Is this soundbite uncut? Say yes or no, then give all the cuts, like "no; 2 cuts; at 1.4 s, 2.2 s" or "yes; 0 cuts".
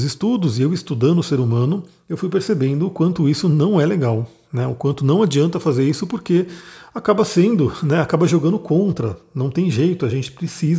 yes; 0 cuts